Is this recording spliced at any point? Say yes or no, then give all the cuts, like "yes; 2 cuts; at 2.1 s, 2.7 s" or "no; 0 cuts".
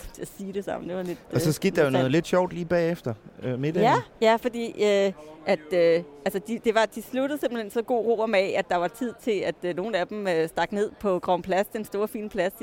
no; 0 cuts